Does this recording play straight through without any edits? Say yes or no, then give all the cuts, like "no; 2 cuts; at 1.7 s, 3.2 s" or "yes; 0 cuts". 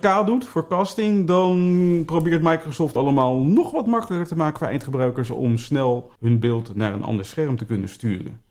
no; 2 cuts; at 3.0 s, 6.2 s